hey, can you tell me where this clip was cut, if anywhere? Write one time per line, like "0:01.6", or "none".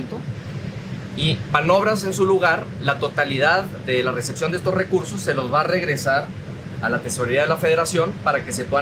none